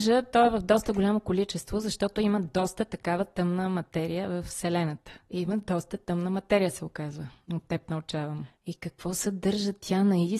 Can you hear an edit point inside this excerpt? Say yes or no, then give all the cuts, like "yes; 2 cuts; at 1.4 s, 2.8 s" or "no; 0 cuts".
no; 0 cuts